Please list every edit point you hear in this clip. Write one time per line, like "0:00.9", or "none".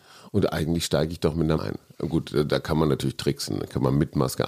0:01.6